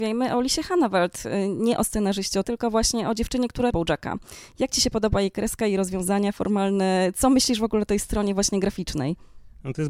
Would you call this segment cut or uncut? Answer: cut